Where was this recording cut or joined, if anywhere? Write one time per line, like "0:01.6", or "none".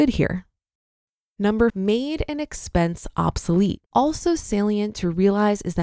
0:01.7
0:03.9